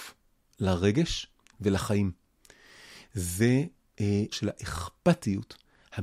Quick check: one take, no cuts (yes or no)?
no